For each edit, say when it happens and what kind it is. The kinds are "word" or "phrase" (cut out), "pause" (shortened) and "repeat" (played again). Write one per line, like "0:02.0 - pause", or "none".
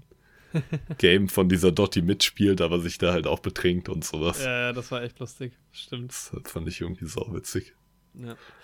0:05.6 - pause